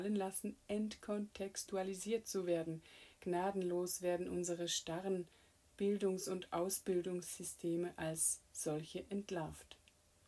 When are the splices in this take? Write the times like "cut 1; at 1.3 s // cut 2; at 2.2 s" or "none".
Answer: none